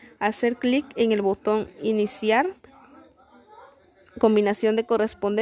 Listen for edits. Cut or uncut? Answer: uncut